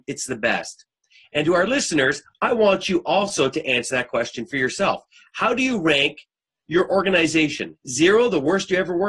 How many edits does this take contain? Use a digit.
0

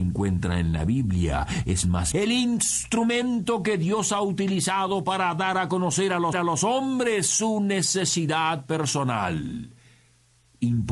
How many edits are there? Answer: 2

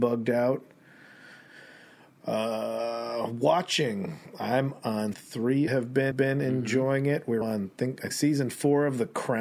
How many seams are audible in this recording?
5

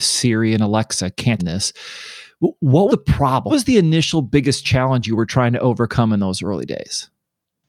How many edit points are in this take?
3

